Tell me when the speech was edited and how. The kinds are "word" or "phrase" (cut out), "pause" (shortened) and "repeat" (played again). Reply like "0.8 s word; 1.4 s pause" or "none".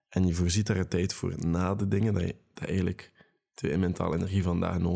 none